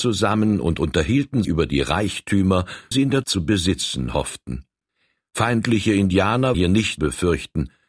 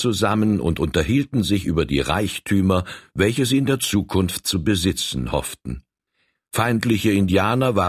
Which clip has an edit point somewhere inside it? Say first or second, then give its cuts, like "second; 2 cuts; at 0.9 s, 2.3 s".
first; 5 cuts; at 1.4 s, 2.9 s, 3.2 s, 6.5 s, 7.0 s